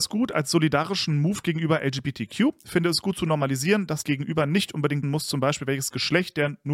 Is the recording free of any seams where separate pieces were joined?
no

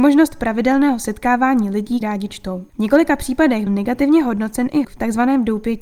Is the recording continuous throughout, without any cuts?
no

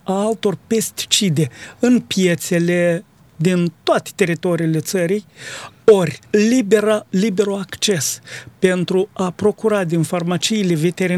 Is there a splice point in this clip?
yes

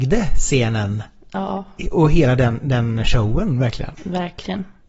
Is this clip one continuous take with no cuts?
yes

